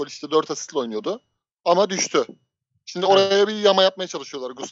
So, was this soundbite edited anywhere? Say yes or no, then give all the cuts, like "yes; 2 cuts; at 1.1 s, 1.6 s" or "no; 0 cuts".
no; 0 cuts